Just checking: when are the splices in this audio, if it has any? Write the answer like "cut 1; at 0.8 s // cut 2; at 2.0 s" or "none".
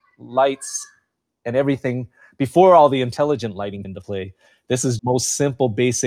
cut 1; at 3.8 s // cut 2; at 5.0 s